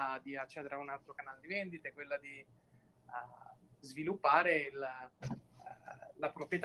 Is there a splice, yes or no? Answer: no